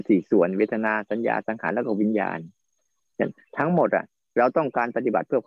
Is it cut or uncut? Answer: uncut